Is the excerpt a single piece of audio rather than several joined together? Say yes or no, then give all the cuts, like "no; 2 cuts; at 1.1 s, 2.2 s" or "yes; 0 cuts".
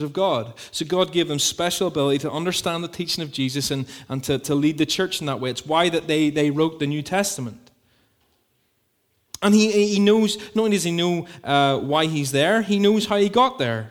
yes; 0 cuts